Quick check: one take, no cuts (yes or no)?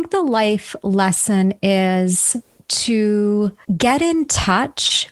no